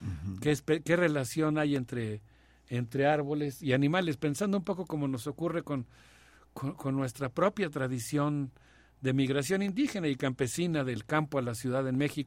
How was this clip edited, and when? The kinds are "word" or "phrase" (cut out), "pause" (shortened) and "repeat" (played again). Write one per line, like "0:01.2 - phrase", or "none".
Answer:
none

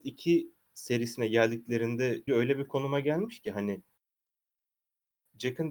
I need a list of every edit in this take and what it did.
0:02.3 - word

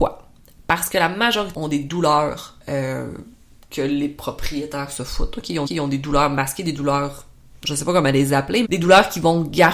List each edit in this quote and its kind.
0:01.5 - phrase
0:02.6 - pause
0:05.7 - repeat
0:08.6 - word

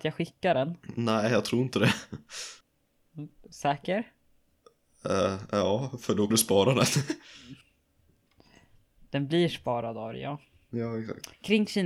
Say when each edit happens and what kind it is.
0:02.6 - pause
0:06.3 - word
0:07.6 - pause

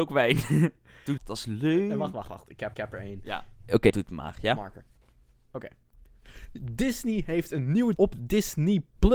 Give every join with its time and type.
0:01.2 - word
0:02.7 - repeat
0:03.5 - pause
0:03.9 - word
0:05.0 - pause
0:07.9 - word

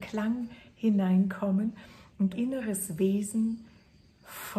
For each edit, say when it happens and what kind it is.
0:02.3 - word

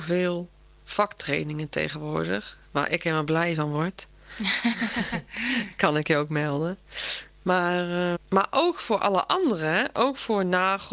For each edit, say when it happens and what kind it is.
0:08.2 - word

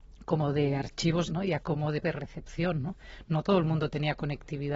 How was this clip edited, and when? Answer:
0:01.3 - word
0:01.6 - word
0:02.0 - word

